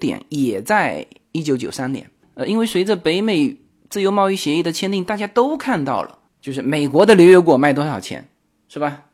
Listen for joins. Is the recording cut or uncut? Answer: uncut